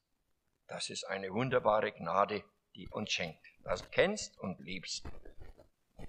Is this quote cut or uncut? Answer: cut